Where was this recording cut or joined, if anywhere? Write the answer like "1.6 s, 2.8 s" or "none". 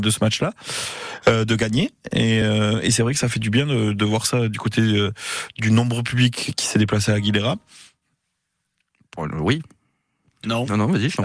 none